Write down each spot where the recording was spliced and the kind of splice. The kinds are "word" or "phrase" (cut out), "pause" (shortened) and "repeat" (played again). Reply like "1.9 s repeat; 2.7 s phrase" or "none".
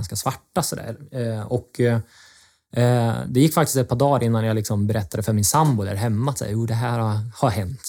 none